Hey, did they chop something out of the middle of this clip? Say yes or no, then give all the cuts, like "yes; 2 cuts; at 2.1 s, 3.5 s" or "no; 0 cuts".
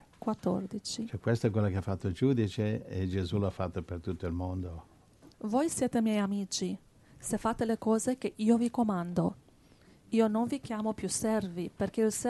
yes; 1 cut; at 5.3 s